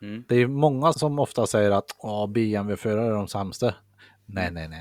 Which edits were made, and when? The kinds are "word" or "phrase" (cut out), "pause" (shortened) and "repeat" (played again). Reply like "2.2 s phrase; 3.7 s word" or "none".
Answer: 0.9 s word